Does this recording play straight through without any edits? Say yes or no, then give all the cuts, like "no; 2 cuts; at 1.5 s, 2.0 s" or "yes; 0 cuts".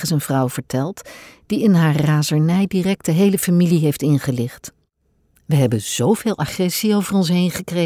yes; 0 cuts